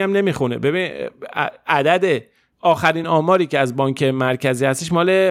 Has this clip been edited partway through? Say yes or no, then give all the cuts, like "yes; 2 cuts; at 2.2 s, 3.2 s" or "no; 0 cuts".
no; 0 cuts